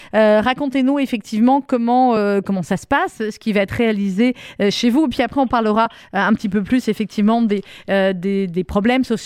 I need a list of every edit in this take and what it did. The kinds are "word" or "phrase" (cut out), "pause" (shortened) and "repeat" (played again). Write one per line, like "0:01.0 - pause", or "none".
none